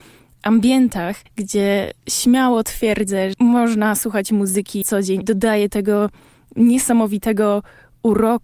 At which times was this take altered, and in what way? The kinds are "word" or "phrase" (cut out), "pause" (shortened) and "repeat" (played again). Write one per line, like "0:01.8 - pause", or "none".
0:01.3 - pause
0:03.3 - word
0:04.8 - word
0:05.2 - word
0:05.7 - word